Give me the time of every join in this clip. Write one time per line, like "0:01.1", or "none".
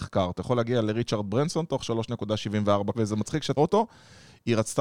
0:02.9
0:03.6